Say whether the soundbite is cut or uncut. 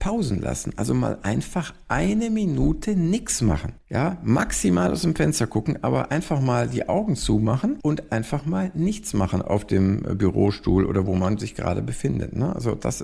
cut